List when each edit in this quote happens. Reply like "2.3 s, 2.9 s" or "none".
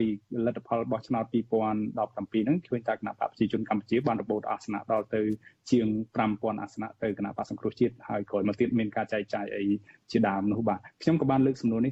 none

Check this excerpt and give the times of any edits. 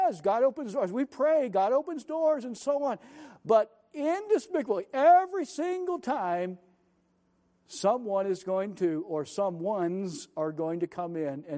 none

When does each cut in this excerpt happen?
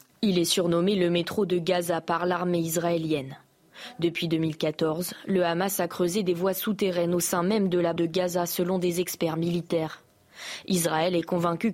8.0 s

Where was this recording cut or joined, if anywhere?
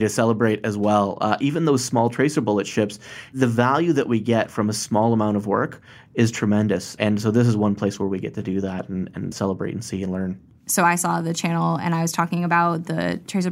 9.3 s

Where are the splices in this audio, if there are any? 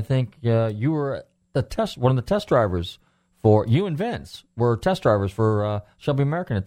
none

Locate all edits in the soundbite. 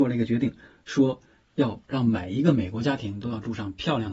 none

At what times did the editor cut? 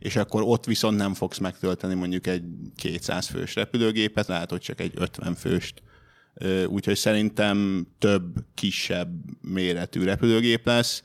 4.3 s

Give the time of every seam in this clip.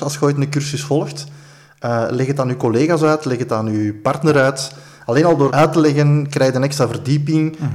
5.5 s

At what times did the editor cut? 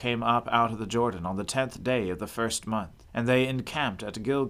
3.1 s

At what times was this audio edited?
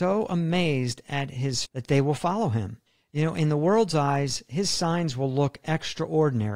1.7 s, 2.9 s

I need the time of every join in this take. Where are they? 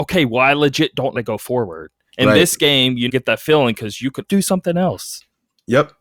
1.2 s, 3.1 s, 4.3 s

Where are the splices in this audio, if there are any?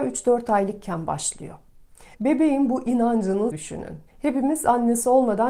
2.1 s, 3.5 s, 4.1 s

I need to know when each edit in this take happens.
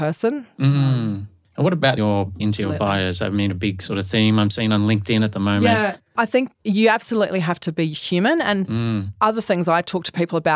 2.0 s, 2.4 s, 6.5 s

